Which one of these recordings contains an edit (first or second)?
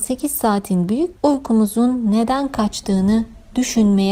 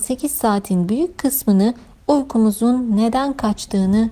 first